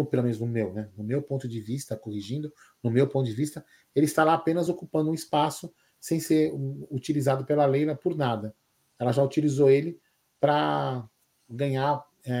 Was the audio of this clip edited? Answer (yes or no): no